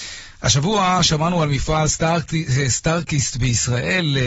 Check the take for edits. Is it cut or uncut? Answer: uncut